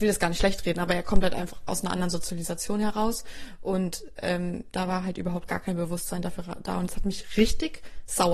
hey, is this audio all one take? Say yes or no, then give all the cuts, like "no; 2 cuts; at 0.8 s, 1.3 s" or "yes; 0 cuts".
yes; 0 cuts